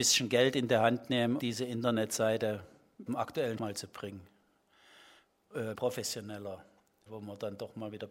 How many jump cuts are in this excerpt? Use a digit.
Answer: 5